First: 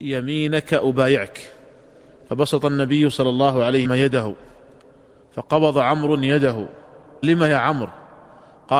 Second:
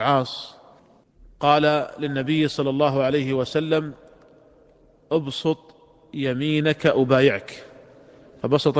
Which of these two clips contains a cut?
first; 2 cuts; at 3.8 s, 7.2 s

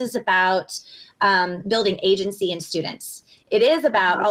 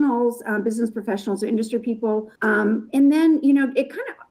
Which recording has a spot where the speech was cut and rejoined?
second; 1 cut; at 2.4 s

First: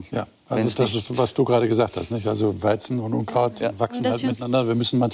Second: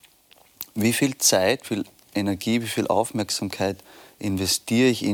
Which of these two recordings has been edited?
second; 1 cut; at 1.6 s

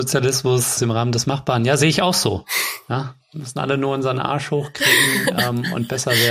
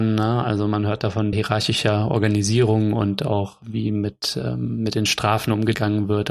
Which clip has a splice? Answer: second; 1 cut; at 1.3 s

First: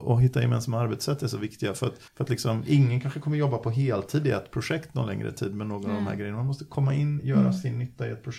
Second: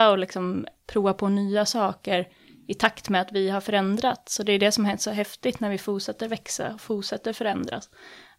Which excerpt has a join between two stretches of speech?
first; 1 cut; at 2.1 s

